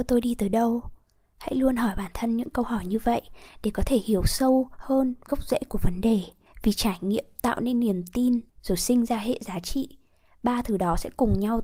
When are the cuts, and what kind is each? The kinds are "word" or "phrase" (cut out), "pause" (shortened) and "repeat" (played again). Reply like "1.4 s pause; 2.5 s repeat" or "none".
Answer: 6.5 s pause; 8.5 s pause